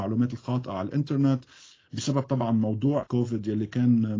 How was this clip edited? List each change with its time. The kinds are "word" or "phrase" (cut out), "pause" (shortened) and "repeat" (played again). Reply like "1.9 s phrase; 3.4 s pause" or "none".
3.0 s word